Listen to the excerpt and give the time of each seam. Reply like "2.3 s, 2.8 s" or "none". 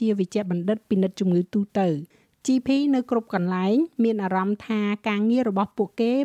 none